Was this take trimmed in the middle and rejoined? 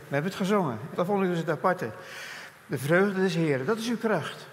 yes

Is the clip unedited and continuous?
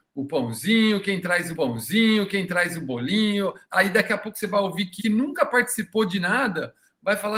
no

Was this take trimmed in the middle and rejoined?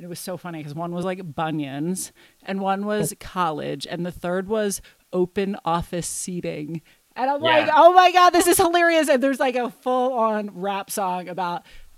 no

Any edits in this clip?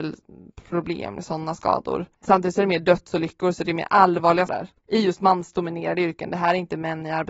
yes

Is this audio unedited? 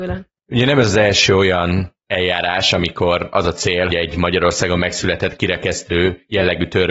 no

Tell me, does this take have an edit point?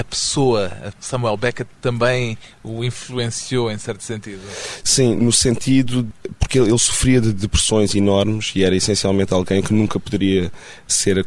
yes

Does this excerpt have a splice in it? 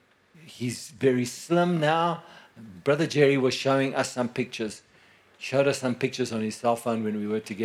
no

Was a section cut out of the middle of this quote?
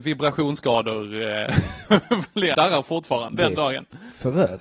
yes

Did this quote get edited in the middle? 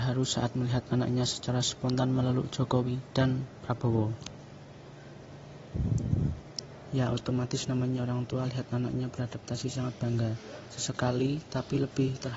no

